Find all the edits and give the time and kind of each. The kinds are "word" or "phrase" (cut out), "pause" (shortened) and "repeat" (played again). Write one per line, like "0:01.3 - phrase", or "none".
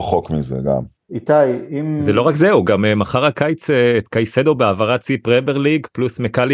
none